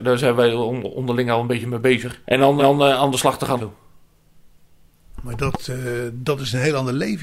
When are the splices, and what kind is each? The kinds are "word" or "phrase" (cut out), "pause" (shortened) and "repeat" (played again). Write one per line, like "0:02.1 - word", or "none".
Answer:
0:02.2 - pause
0:02.6 - repeat
0:03.6 - phrase